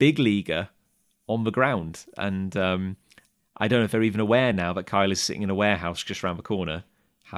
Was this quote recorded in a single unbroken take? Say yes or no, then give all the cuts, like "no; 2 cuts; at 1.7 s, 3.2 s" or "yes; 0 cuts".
yes; 0 cuts